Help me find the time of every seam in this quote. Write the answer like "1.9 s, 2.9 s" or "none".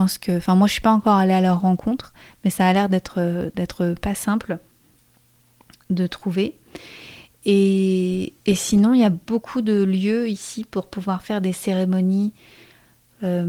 8.4 s